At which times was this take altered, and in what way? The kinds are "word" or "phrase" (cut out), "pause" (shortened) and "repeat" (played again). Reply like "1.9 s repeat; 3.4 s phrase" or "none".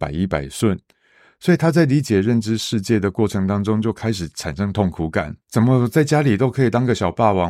5.4 s pause